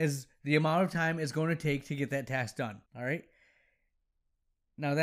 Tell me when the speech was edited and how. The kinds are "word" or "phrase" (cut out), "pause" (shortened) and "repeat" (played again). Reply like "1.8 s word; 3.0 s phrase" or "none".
2.9 s pause